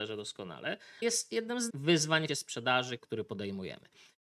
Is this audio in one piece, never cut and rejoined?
no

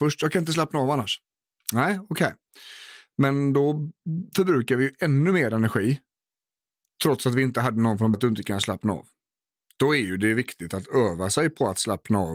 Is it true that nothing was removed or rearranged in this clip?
no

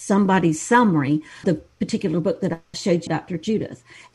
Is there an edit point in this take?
yes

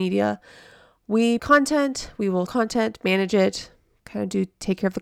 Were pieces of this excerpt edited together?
yes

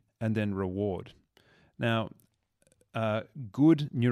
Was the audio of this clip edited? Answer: no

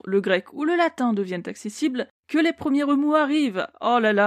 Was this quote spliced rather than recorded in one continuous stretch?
no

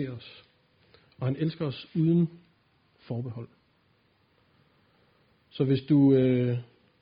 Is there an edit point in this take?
no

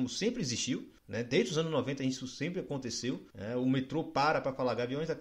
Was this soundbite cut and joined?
yes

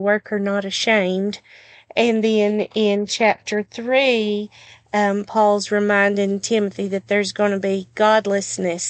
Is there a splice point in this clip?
no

